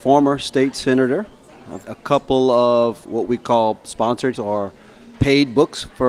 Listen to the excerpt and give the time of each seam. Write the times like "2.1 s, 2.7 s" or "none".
1.8 s, 3.0 s, 4.3 s